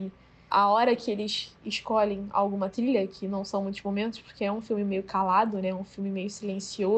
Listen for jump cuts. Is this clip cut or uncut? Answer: uncut